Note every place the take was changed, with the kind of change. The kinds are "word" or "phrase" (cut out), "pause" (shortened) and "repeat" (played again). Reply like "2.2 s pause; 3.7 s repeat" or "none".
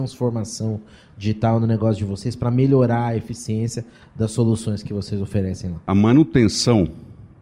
none